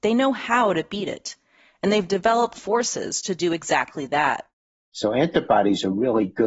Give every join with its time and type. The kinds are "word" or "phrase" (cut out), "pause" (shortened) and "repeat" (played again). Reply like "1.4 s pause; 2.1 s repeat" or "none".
2.5 s word